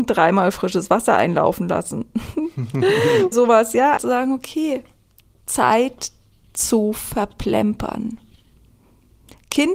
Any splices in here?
yes; 2 cuts; at 3.3 s, 4.0 s

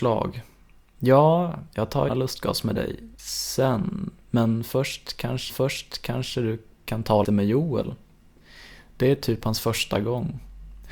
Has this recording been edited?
yes; 4 cuts; at 2.1 s, 3.1 s, 5.5 s, 7.2 s

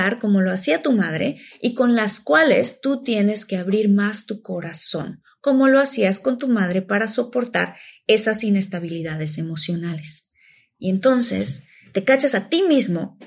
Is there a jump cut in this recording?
no; 0 cuts

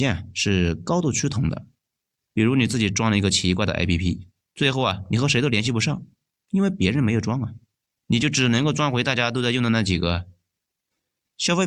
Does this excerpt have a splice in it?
no; 0 cuts

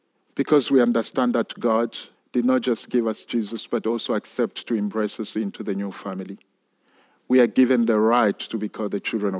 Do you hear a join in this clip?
yes; 1 cut; at 2.1 s

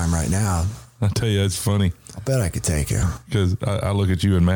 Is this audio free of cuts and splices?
yes; 0 cuts

